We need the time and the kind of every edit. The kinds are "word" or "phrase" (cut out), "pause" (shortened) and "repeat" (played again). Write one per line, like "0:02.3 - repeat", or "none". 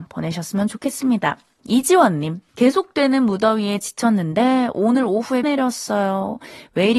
0:02.5 - pause
0:05.4 - word